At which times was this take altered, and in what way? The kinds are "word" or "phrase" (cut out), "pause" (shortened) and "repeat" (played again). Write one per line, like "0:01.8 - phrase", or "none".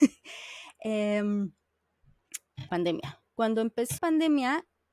0:02.7 - word
0:03.3 - pause
0:04.0 - word